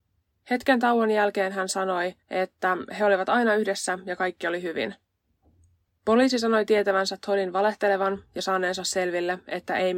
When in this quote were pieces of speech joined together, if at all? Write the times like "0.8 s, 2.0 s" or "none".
2.2 s